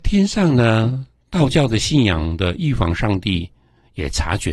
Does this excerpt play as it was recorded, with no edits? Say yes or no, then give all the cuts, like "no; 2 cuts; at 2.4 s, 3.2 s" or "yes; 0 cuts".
yes; 0 cuts